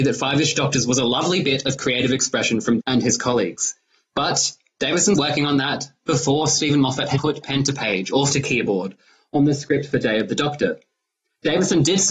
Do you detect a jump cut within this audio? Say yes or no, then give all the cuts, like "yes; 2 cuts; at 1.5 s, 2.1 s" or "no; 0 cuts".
yes; 4 cuts; at 2.8 s, 5.1 s, 7.2 s, 8.3 s